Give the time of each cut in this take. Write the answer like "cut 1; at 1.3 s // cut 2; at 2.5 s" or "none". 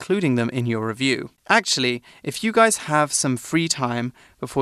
cut 1; at 1.4 s